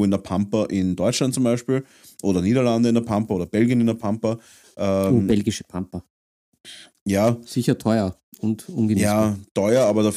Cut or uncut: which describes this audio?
uncut